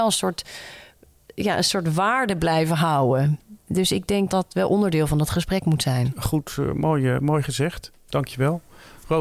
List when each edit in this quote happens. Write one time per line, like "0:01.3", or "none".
0:04.3

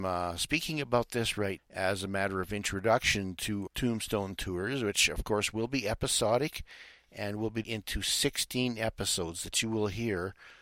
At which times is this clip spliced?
0:01.6
0:03.7
0:07.6

